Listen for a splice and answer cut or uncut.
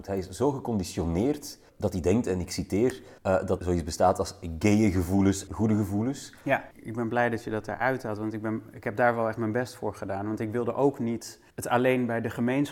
cut